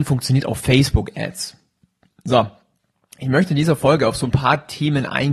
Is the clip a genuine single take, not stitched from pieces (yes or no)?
yes